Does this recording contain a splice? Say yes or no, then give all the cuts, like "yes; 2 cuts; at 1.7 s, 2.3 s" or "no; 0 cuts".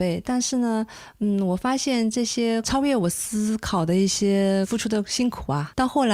no; 0 cuts